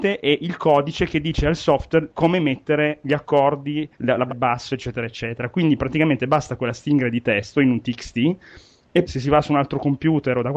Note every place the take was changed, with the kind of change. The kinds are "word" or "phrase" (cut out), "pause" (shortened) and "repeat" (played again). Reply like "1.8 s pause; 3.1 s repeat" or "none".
3.9 s pause; 4.3 s word; 6.6 s word; 9.0 s word